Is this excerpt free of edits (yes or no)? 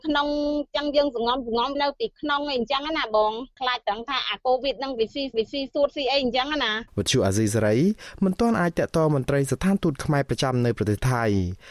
no